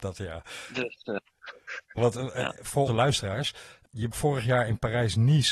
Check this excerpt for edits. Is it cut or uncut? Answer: cut